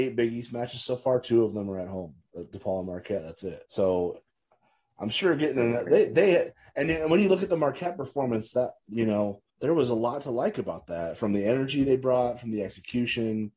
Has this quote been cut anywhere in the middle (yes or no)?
yes